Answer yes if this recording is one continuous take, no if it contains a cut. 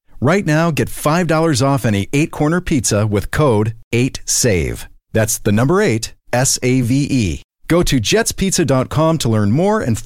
yes